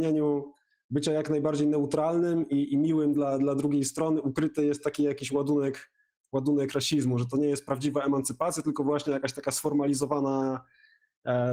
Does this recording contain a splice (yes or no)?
no